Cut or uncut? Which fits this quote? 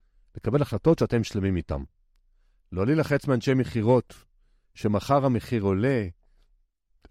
uncut